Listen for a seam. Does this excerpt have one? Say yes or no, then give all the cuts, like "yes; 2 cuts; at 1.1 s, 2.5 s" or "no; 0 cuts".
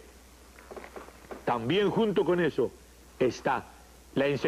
no; 0 cuts